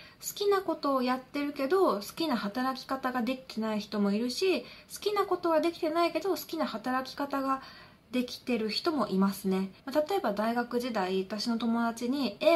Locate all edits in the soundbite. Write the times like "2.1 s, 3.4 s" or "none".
9.8 s